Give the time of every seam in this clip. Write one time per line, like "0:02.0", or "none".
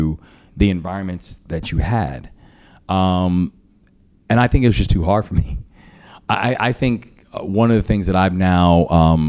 none